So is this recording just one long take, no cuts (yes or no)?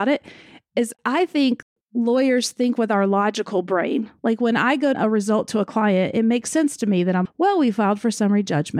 no